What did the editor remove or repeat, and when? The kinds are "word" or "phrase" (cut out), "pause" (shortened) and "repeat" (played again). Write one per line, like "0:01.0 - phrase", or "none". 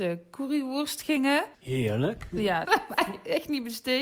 0:01.5 - pause
0:02.6 - phrase